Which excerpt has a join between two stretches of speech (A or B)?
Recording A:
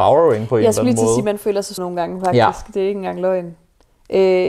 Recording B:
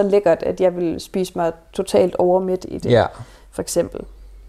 A